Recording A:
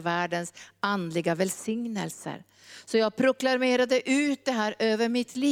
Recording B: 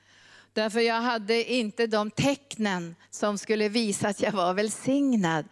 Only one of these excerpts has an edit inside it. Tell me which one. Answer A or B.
B